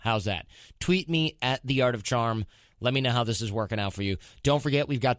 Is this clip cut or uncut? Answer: uncut